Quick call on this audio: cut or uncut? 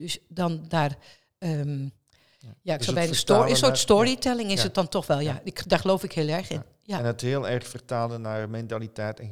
uncut